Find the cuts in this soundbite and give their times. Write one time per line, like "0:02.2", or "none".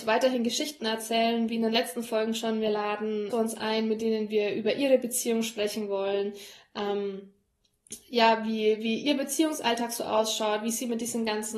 0:03.3